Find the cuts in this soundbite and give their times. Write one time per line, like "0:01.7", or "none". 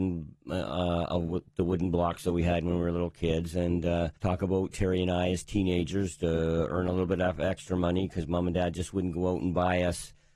0:04.2